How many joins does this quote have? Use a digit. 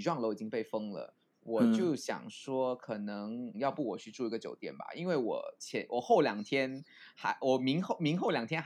1